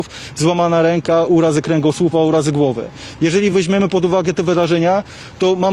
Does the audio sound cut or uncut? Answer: uncut